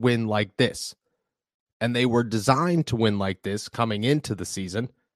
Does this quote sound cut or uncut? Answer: uncut